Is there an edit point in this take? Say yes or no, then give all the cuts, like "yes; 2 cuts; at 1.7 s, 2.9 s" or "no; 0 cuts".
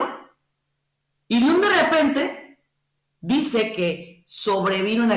no; 0 cuts